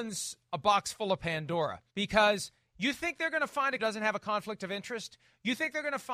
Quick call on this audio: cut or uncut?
cut